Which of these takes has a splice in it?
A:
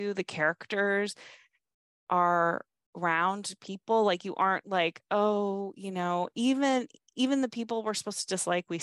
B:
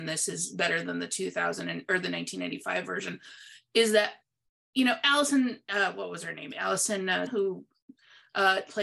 B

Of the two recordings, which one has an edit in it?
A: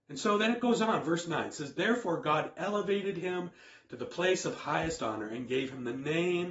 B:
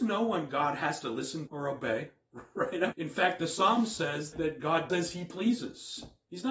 B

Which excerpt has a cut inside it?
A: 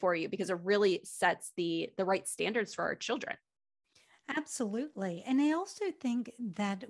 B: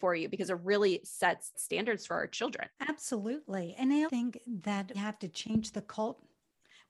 B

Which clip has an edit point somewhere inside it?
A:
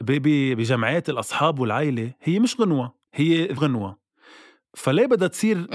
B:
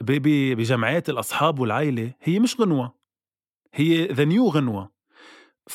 A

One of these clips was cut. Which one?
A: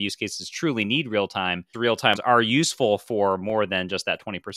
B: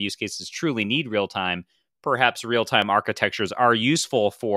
A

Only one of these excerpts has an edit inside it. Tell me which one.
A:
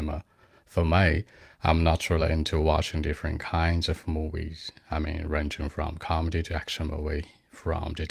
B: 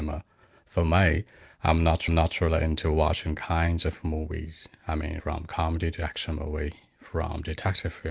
B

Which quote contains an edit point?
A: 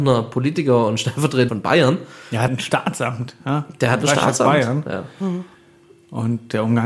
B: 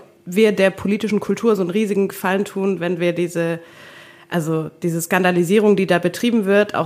A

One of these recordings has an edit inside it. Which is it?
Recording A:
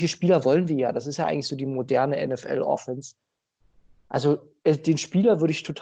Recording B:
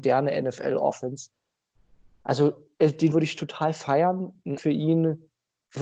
B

